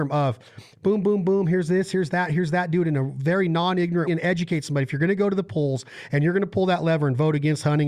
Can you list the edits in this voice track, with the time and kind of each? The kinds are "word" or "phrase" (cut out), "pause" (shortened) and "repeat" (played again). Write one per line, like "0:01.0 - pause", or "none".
0:04.1 - phrase